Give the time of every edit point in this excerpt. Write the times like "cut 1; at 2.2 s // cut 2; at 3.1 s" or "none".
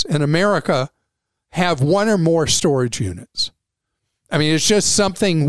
none